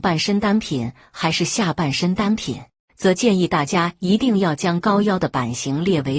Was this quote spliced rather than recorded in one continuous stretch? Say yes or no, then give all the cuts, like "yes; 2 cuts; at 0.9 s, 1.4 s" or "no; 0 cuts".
no; 0 cuts